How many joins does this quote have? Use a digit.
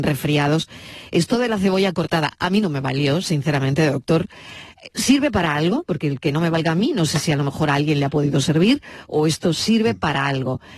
0